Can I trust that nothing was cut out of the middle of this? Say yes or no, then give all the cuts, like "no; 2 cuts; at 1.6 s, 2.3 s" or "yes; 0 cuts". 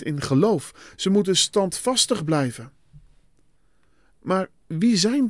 yes; 0 cuts